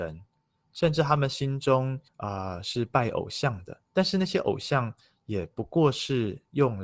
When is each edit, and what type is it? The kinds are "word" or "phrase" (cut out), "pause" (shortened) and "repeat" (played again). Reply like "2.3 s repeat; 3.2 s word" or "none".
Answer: 2.1 s pause; 3.9 s pause